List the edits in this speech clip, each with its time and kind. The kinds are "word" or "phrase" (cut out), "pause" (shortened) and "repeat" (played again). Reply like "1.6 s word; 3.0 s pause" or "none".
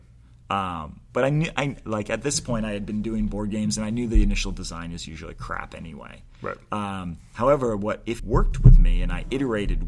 8.2 s word